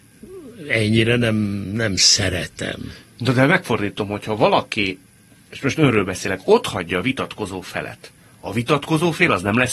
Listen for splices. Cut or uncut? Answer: uncut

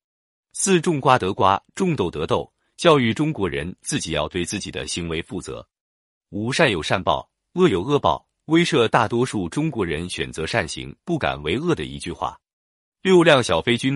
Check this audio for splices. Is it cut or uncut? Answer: cut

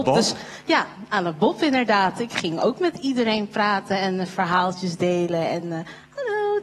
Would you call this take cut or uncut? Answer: uncut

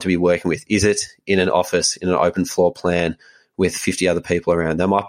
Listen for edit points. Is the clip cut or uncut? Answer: uncut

